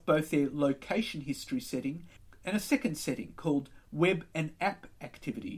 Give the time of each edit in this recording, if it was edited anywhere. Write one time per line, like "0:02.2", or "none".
none